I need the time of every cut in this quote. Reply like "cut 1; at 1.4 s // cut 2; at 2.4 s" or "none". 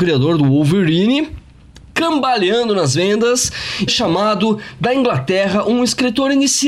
cut 1; at 3.9 s